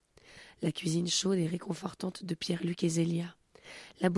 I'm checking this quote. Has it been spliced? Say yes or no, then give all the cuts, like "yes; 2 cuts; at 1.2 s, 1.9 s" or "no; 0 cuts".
no; 0 cuts